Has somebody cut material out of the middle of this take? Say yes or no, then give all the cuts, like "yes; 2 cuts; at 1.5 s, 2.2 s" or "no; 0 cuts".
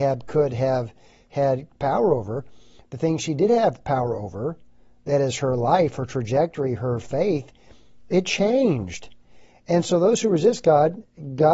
no; 0 cuts